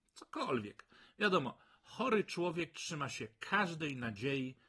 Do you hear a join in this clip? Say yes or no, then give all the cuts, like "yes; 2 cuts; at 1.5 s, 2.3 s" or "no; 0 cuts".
no; 0 cuts